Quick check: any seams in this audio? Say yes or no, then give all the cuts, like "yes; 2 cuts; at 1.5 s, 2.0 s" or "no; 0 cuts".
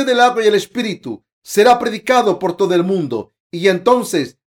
no; 0 cuts